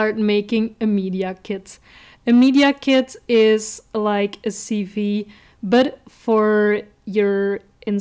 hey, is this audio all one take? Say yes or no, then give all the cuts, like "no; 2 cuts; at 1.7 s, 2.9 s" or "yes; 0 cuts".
yes; 0 cuts